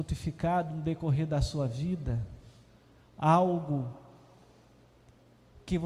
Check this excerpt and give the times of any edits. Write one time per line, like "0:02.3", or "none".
none